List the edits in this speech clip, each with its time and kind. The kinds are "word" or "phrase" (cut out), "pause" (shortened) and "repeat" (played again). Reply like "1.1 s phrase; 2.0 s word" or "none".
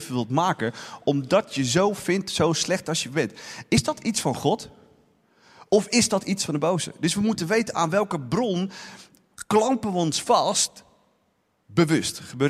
none